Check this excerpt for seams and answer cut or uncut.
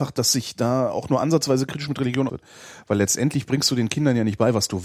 cut